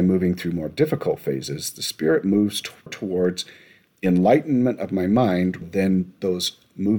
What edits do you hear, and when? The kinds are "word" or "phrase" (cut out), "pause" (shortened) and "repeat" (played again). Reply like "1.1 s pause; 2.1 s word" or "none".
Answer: 2.9 s word; 5.6 s word